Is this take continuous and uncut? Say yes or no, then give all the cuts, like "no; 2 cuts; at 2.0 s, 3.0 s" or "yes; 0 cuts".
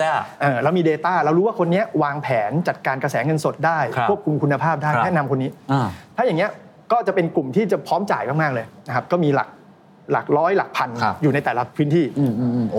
yes; 0 cuts